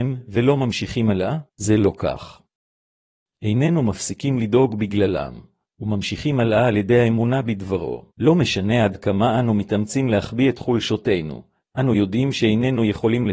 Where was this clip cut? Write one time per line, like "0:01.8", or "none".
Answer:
0:01.5
0:08.1

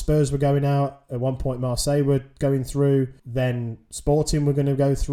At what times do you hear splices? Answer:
0:03.2

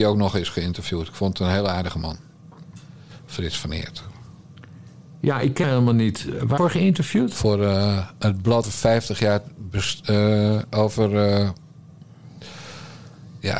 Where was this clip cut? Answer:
0:05.6
0:06.6
0:08.6

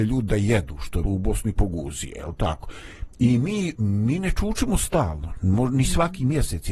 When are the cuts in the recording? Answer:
0:01.0
0:03.7

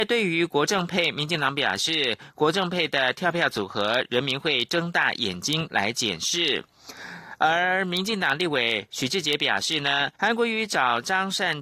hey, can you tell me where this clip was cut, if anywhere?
0:10.2

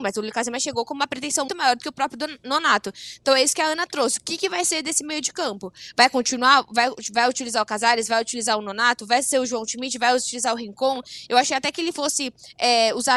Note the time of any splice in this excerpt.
0:01.5

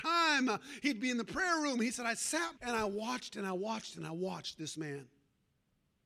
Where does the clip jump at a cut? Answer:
0:02.6

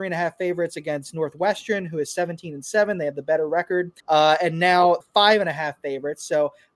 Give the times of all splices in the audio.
0:04.0
0:05.0

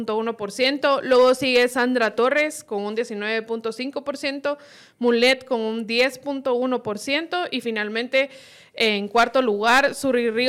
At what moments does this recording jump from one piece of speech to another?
none

